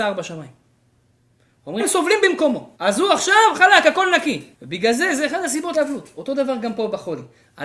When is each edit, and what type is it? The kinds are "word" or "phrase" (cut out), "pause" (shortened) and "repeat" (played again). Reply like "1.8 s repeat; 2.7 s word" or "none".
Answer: 1.8 s word; 2.7 s pause; 3.5 s word; 4.5 s pause; 5.7 s word